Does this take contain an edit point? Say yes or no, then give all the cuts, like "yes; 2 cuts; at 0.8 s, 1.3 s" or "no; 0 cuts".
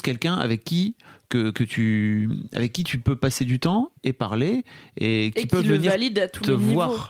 no; 0 cuts